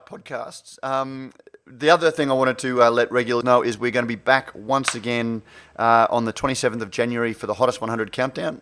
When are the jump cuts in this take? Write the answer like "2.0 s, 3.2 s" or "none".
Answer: 3.4 s